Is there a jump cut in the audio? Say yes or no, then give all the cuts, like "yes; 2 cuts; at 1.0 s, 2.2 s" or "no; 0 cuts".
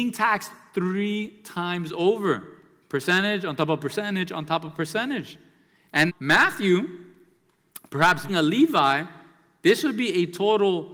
yes; 2 cuts; at 6.1 s, 8.3 s